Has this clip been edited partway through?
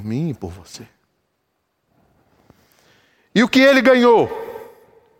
no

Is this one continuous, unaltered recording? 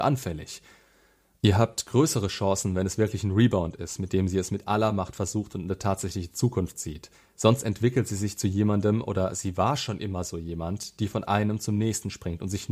yes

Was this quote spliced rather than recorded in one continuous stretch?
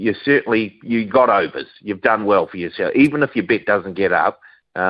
no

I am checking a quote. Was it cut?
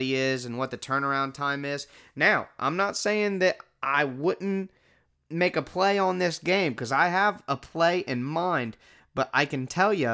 no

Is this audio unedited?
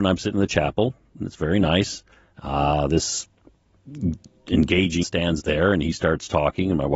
no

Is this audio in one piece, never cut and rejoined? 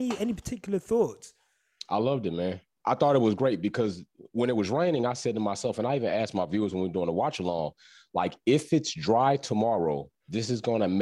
yes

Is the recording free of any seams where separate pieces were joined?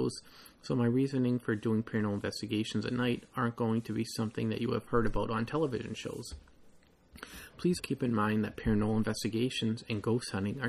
no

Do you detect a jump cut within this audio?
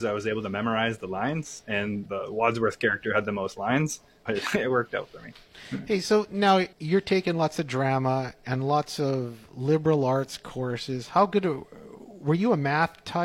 yes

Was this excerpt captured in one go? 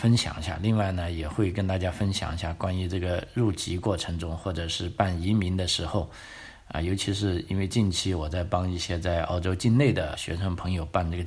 no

